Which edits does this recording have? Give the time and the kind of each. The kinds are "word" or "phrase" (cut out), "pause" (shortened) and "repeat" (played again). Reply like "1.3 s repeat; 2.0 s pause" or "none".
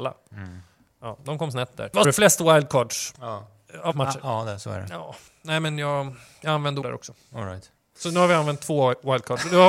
2.0 s word; 3.9 s word; 6.8 s word